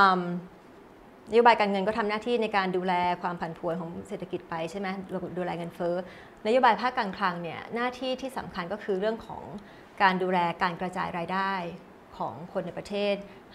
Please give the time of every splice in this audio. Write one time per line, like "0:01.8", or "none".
none